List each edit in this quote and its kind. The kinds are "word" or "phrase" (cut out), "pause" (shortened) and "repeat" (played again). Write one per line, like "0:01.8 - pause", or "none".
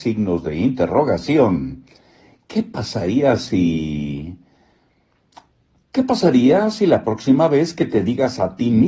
none